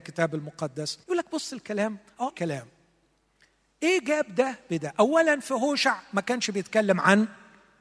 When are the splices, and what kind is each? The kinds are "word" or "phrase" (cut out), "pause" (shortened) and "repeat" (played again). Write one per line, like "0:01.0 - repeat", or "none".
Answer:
0:01.0 - pause
0:02.3 - word